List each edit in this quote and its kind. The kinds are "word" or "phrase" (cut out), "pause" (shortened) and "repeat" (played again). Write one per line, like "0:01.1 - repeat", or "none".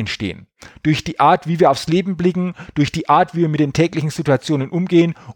none